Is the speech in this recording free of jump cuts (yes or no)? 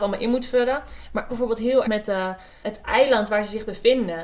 no